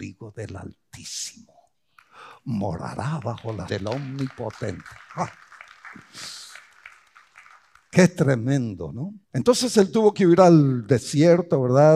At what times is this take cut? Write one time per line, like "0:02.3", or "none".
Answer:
0:03.7
0:09.2

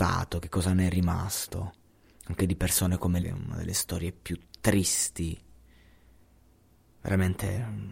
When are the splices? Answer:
0:03.2

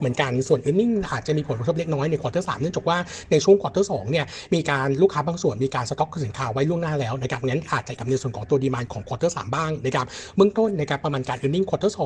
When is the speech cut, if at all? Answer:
0:08.0

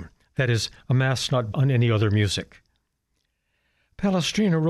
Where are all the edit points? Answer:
0:01.5

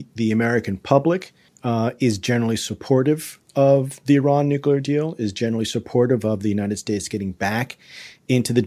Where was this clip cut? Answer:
0:01.5

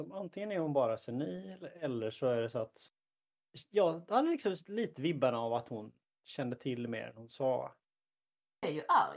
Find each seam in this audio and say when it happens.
none

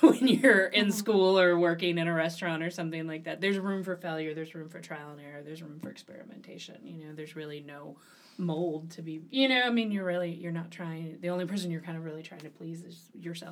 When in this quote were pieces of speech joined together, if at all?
0:08.1

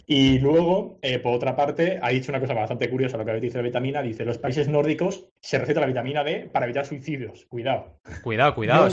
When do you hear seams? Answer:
0:05.4

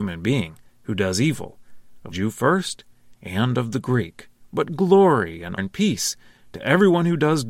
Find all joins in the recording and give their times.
0:02.1
0:04.4
0:05.6

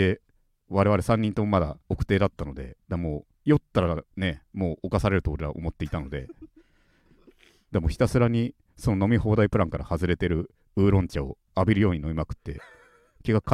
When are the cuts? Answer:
0:01.8
0:02.8
0:03.3
0:04.1

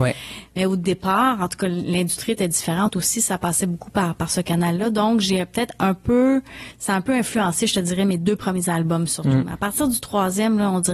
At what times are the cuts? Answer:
none

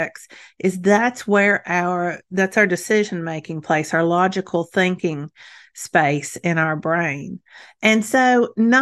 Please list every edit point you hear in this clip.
none

